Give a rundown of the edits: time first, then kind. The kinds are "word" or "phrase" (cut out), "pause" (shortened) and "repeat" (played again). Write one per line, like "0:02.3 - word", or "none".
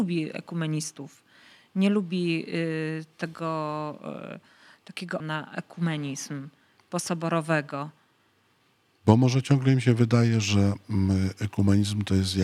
0:05.2 - word